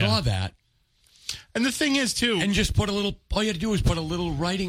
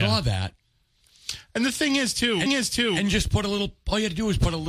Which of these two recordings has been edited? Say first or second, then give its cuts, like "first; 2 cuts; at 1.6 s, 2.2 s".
second; 1 cut; at 2.5 s